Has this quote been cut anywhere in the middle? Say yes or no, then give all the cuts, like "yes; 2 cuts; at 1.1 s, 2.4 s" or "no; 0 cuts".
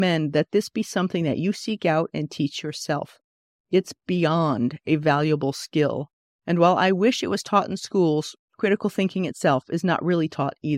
no; 0 cuts